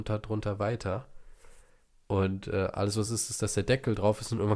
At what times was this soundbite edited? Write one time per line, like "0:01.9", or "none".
none